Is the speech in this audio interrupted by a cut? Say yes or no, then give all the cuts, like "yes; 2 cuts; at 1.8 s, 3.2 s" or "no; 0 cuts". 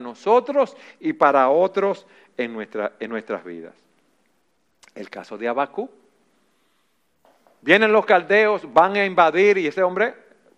no; 0 cuts